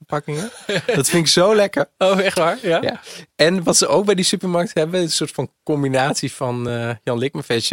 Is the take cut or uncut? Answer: uncut